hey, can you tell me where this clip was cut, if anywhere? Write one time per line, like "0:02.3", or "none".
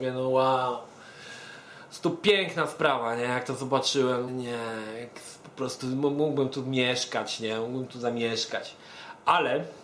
0:04.3